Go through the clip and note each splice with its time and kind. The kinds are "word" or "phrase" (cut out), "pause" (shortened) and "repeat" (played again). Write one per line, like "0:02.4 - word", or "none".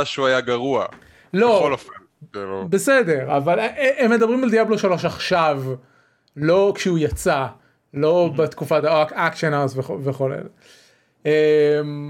none